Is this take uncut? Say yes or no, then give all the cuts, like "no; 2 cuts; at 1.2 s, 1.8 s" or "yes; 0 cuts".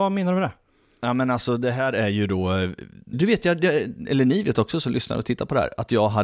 no; 1 cut; at 3.1 s